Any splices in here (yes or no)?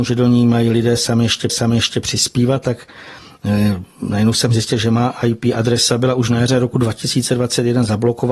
yes